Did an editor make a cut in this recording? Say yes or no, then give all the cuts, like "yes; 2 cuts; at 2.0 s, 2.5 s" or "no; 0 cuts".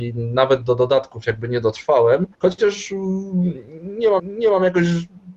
yes; 2 cuts; at 2.3 s, 4.2 s